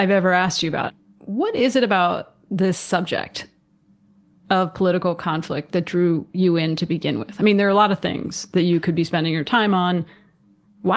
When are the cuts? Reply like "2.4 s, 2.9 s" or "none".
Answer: none